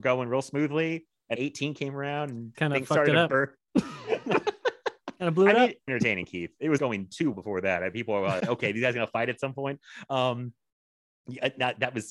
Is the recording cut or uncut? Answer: cut